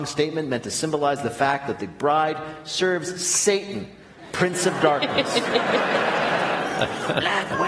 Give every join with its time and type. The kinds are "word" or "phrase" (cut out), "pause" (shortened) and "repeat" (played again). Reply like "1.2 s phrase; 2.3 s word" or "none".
none